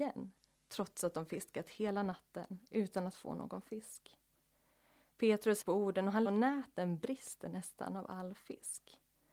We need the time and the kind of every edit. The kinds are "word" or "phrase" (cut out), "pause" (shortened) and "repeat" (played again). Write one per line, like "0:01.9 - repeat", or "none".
0:05.6 - phrase
0:06.2 - phrase